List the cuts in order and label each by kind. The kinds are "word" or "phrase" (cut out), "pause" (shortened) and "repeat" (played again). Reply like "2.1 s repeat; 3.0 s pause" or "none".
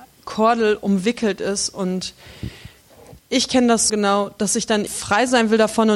3.2 s pause; 3.9 s word; 4.9 s word